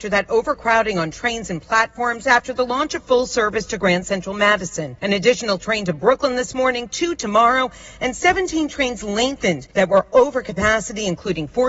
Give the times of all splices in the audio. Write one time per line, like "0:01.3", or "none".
0:05.0
0:09.7